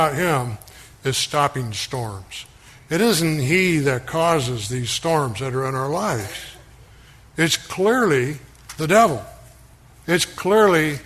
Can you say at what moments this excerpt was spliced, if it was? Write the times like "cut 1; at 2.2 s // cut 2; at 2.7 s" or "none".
none